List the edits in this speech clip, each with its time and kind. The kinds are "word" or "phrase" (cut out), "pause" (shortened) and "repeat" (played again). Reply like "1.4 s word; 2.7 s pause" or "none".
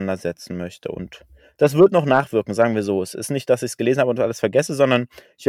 none